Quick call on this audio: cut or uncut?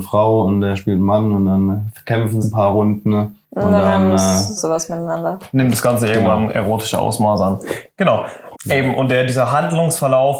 cut